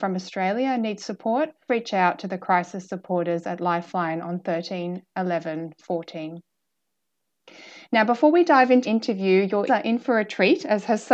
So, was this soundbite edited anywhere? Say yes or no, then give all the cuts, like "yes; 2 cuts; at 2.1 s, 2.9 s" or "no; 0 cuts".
yes; 3 cuts; at 1.7 s, 8.8 s, 9.7 s